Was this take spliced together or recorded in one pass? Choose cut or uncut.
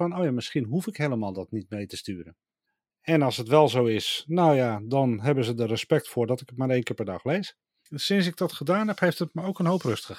uncut